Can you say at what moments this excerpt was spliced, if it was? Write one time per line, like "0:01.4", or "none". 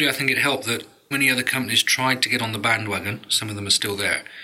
0:01.1